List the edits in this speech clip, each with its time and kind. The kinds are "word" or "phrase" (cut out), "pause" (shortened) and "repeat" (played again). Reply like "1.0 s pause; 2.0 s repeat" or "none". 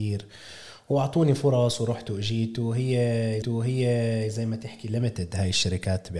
3.4 s repeat